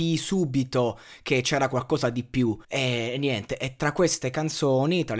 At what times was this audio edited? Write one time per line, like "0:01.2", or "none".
0:02.6